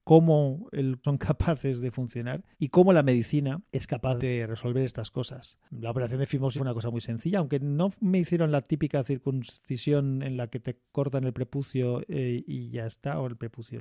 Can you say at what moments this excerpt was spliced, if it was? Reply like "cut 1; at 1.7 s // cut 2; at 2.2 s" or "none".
cut 1; at 1.0 s // cut 2; at 2.5 s // cut 3; at 6.5 s